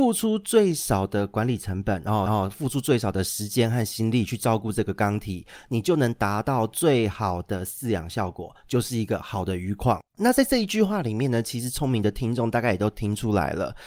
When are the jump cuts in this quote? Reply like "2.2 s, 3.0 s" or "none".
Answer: 2.3 s, 10.1 s